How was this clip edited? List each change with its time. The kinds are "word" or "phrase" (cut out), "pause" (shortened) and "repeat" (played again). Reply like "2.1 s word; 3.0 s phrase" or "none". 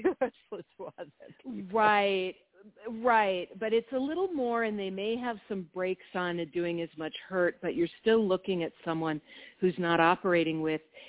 none